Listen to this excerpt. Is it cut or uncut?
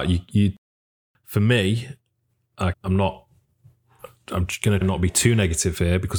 cut